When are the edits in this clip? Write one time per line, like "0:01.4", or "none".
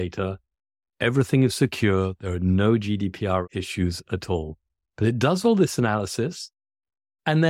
none